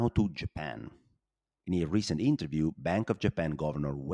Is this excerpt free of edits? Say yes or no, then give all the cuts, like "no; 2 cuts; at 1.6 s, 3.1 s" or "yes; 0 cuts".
yes; 0 cuts